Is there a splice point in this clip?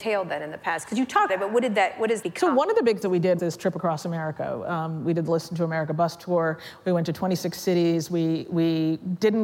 yes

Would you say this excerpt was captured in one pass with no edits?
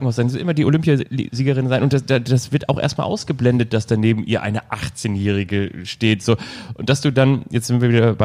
yes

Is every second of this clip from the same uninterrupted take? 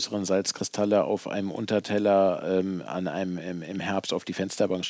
yes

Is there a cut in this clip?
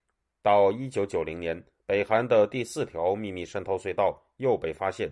yes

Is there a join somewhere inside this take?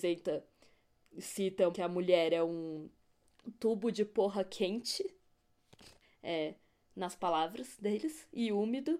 yes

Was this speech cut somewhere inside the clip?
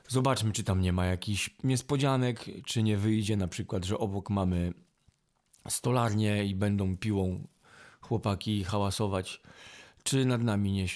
no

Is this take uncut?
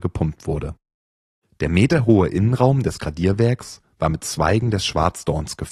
yes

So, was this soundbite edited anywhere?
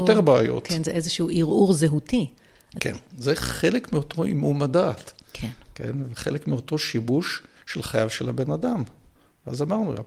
yes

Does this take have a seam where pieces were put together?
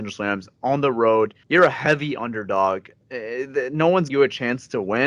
yes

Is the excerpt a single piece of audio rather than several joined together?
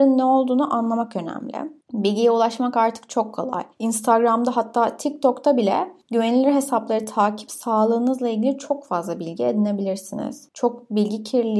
no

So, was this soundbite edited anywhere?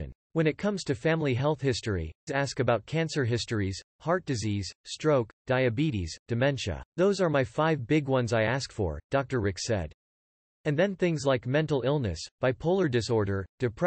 yes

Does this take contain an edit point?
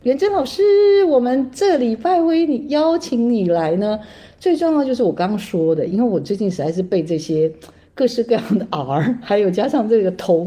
no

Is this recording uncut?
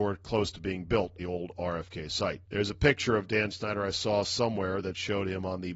no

